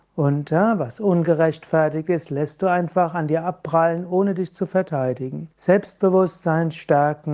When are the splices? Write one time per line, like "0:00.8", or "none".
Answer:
0:05.5